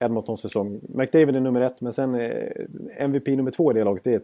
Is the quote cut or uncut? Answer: uncut